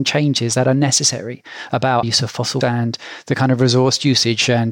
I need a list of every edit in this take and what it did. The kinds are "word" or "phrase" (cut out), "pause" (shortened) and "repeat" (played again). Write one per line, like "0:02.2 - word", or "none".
0:02.0 - word
0:02.6 - word